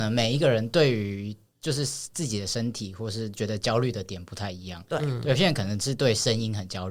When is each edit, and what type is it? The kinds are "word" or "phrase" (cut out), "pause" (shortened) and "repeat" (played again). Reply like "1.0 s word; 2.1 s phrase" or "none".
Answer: none